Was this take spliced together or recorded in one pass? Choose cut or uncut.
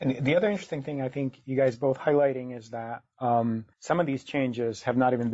cut